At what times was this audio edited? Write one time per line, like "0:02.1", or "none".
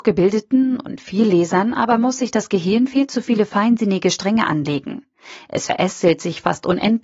none